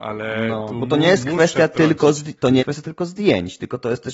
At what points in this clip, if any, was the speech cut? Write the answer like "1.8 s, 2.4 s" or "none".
2.6 s